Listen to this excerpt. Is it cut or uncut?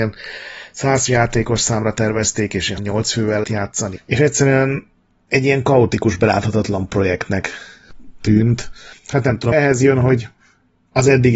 cut